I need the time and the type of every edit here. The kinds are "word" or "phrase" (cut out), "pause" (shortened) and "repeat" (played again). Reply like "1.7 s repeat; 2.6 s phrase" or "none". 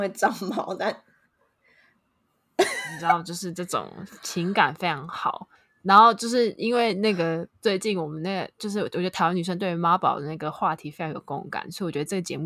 5.5 s pause; 7.5 s pause